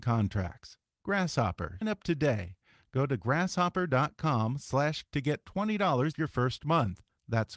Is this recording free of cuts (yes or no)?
no